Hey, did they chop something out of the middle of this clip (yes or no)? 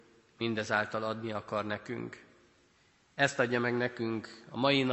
no